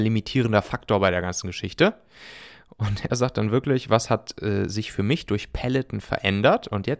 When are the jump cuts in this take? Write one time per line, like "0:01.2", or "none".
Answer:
none